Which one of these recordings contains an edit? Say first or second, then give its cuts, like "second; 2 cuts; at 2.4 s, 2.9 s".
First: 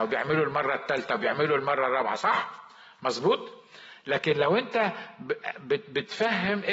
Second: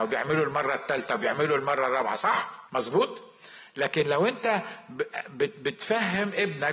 second; 1 cut; at 2.7 s